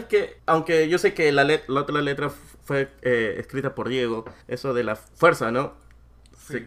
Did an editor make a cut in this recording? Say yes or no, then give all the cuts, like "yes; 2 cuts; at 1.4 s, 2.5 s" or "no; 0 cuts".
yes; 1 cut; at 4.4 s